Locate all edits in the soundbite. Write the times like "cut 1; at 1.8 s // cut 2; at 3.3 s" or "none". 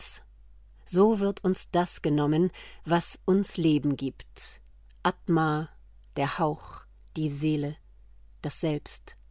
none